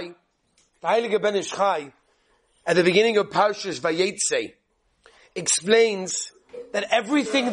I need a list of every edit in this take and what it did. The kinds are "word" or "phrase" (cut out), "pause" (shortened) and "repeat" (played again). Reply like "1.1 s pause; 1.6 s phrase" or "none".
none